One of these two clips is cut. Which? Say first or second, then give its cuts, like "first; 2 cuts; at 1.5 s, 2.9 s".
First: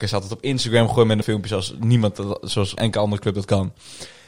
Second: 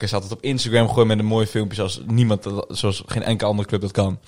first; 2 cuts; at 1.2 s, 2.8 s